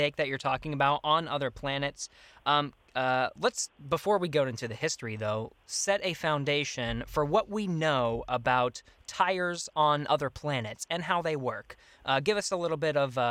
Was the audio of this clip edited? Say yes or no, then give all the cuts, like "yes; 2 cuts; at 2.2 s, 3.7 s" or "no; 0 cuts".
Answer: no; 0 cuts